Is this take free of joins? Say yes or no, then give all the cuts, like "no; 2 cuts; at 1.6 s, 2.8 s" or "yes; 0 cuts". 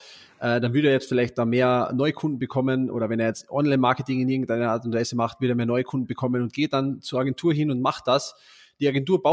yes; 0 cuts